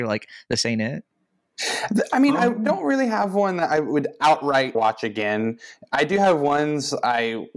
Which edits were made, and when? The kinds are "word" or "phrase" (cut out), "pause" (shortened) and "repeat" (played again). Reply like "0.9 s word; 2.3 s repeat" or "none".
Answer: 4.7 s word